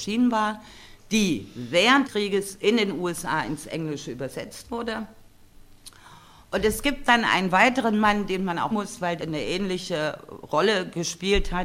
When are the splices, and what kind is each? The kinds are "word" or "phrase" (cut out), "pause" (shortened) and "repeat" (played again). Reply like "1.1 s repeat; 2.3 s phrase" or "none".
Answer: 2.0 s word; 8.7 s word; 9.2 s word